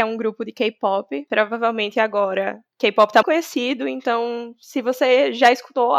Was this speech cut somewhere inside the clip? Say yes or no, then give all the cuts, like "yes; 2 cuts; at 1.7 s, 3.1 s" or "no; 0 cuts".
yes; 1 cut; at 3.2 s